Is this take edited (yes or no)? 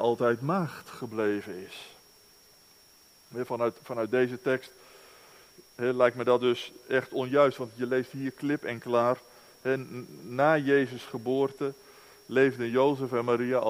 no